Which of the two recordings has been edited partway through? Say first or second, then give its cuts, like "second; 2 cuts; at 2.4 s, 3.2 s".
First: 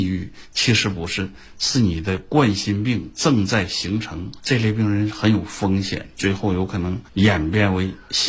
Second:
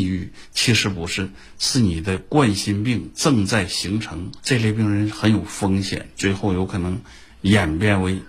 first; 1 cut; at 7.1 s